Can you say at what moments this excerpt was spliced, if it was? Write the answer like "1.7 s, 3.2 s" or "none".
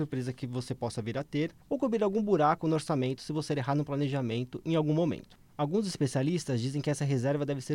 1.6 s

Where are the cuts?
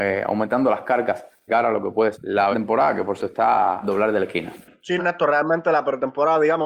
1.5 s, 2.1 s, 2.5 s, 3.2 s, 3.8 s, 5.0 s

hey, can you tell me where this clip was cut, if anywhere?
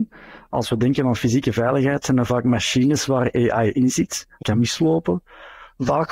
4.4 s

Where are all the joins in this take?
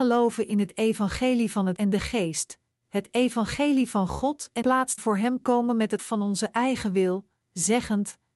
1.8 s, 4.6 s, 5.0 s, 6.0 s

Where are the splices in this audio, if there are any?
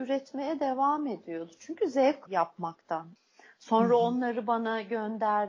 2.3 s

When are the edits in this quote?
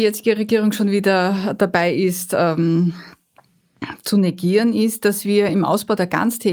none

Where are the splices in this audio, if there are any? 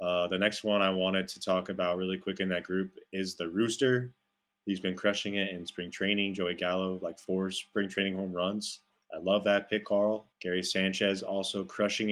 9.0 s, 10.3 s

